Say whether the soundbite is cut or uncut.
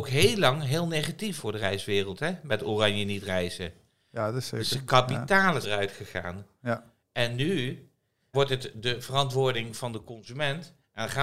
cut